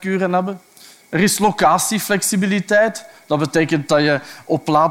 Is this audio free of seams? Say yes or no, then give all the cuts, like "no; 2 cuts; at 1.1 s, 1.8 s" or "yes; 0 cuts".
yes; 0 cuts